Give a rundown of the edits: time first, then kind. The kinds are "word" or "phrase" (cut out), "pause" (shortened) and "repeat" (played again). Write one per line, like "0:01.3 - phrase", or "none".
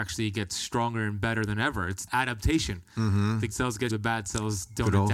0:02.1 - word
0:03.5 - word
0:03.9 - word